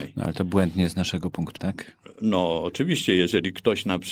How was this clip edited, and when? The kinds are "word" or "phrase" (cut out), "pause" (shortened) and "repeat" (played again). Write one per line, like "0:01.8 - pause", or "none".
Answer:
0:01.6 - word